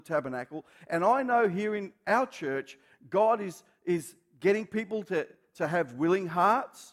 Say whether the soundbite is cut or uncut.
uncut